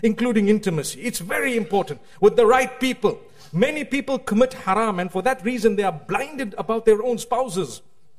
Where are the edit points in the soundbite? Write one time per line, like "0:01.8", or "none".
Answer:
none